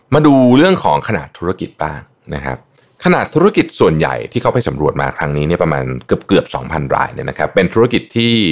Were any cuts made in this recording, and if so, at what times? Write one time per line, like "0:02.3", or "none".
none